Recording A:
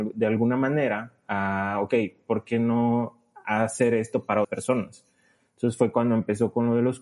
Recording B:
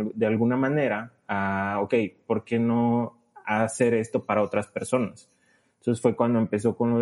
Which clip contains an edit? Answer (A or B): A